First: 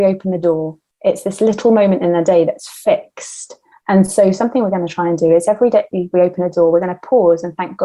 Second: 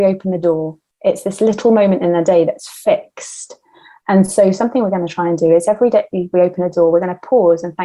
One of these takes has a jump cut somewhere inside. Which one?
first; 1 cut; at 3.7 s

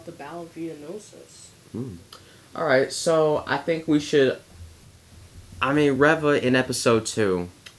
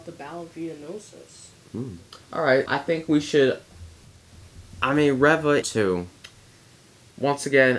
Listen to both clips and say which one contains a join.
second; 3 cuts; at 2.2 s, 2.7 s, 5.6 s

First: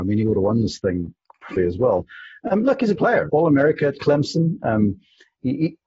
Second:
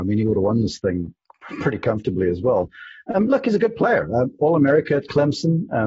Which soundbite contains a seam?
first; 3 cuts; at 1.6 s, 3.0 s, 3.3 s

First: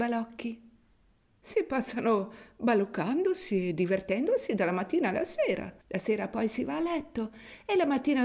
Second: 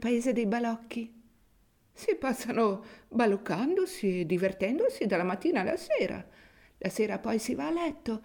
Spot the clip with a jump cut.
first; 1 cut; at 5.8 s

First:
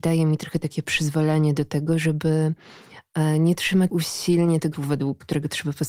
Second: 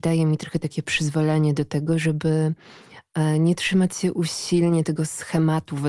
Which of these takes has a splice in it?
first; 2 cuts; at 3.9 s, 4.7 s

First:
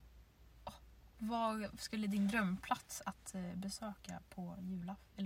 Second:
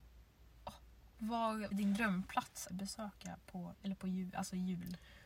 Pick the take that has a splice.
second; 3 cuts; at 1.7 s, 2.7 s, 3.7 s

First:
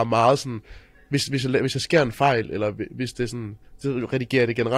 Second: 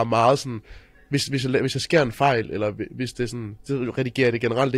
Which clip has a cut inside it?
second; 1 cut; at 3.6 s

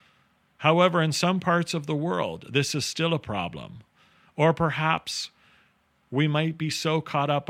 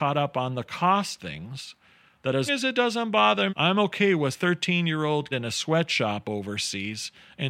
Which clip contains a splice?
second; 5 cuts; at 1.2 s, 2.5 s, 3.5 s, 4.3 s, 5.3 s

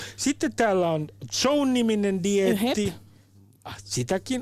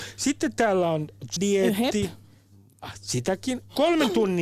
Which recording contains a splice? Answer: second; 1 cut; at 1.4 s

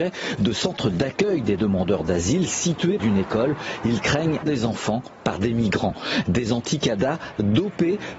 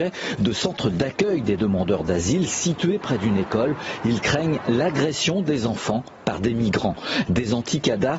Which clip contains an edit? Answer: first; 2 cuts; at 3.0 s, 4.4 s

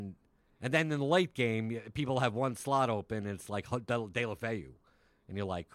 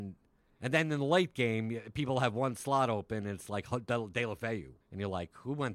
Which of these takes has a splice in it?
second; 1 cut; at 4.8 s

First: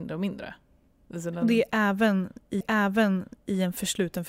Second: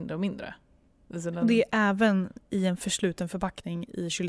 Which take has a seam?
first; 1 cut; at 2.6 s

